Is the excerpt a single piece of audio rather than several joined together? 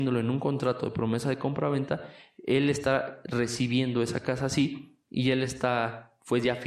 yes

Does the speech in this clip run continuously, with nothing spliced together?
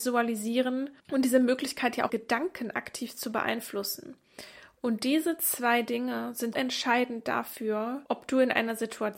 no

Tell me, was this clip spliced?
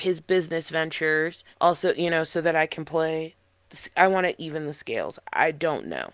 yes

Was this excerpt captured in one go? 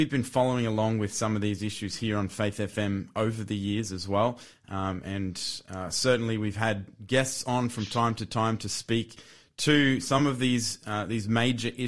yes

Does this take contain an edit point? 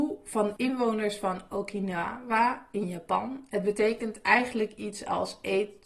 no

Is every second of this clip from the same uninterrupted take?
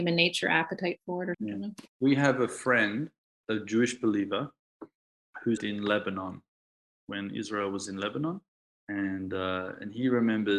no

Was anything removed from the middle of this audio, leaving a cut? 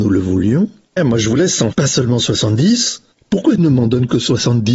yes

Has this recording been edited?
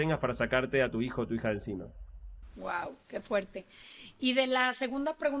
no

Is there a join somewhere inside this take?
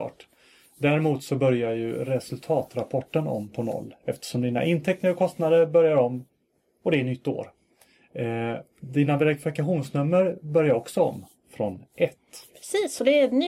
no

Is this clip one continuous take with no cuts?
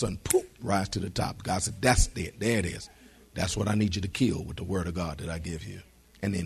yes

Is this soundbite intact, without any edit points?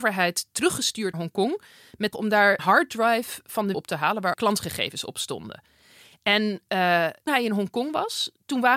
no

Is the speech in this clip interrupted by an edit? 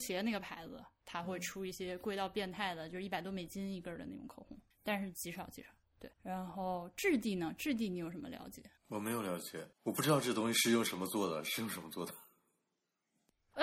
yes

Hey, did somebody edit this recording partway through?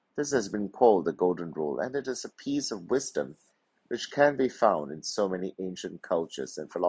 no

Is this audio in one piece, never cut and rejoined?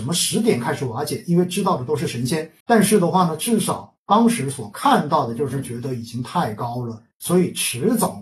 no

